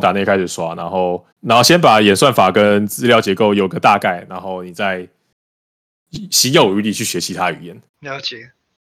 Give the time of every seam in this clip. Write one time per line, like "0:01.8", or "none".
0:01.3
0:07.9

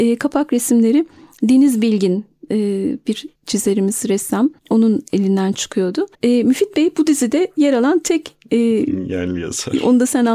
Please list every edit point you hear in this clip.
0:03.4
0:04.6
0:06.1

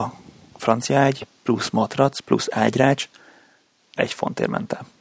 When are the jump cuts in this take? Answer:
0:04.0

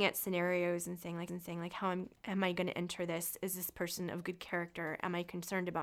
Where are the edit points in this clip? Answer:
0:01.3

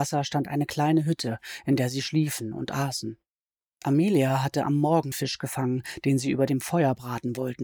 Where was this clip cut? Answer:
0:05.1

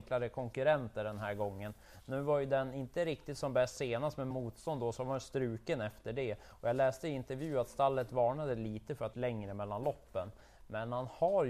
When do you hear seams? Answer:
0:04.3
0:09.1

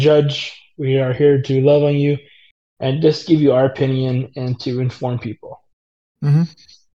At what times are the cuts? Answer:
none

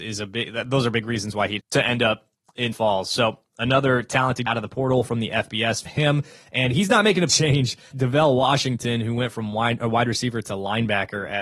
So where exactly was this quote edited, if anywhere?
0:01.6
0:02.7
0:04.5
0:05.9
0:07.3
0:07.9

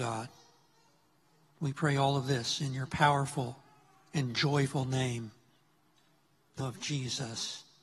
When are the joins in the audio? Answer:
0:06.6

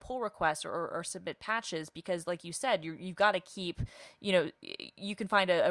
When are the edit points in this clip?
none

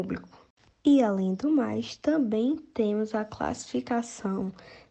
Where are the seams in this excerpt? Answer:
none

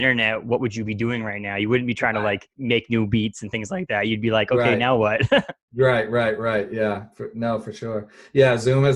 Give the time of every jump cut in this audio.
0:02.5

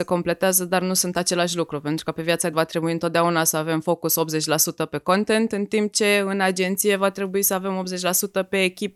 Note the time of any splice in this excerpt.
0:02.5

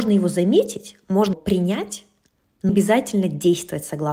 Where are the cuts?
0:01.3
0:02.7

